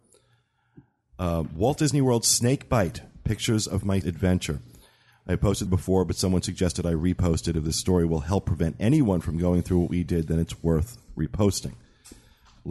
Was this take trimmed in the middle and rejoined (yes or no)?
yes